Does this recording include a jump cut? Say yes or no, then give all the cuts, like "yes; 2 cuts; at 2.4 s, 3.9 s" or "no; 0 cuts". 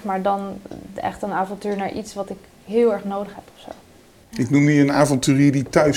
no; 0 cuts